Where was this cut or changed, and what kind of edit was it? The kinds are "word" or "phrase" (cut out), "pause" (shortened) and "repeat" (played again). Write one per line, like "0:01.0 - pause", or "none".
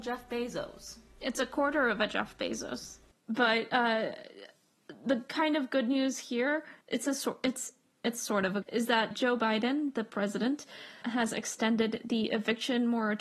0:06.8 - pause
0:08.6 - phrase
0:09.1 - word
0:11.0 - word